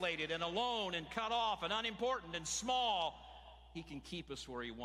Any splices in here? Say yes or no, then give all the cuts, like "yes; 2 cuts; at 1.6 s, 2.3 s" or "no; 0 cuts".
no; 0 cuts